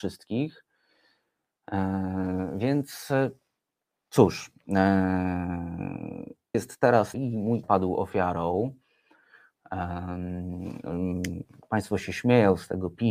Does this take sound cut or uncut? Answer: cut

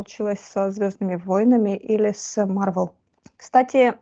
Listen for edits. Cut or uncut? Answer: uncut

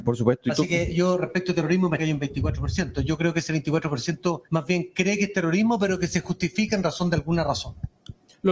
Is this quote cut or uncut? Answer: cut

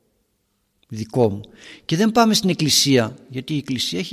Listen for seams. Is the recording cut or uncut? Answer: uncut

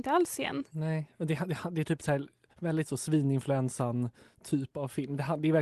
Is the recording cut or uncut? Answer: uncut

